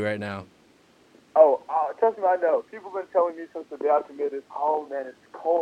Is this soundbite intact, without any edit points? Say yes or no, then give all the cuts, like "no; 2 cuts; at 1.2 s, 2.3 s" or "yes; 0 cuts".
no; 1 cut; at 4.4 s